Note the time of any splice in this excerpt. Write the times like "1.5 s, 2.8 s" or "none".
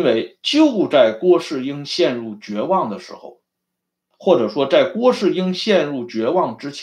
none